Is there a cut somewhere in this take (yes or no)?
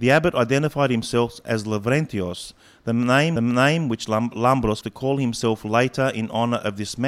yes